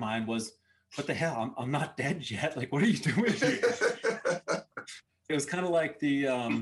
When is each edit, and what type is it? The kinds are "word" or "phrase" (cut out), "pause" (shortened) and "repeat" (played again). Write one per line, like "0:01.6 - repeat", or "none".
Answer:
0:05.3 - word